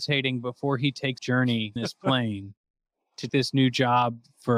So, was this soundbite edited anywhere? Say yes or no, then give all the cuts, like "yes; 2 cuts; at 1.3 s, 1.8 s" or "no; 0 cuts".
yes; 3 cuts; at 1.2 s, 1.8 s, 3.3 s